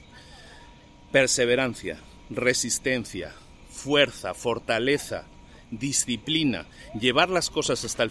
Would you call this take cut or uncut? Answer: uncut